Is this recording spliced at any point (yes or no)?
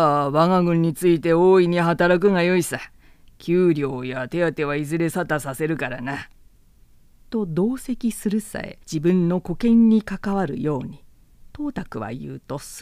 yes